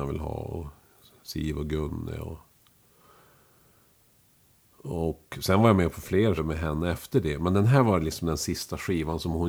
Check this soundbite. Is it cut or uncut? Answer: cut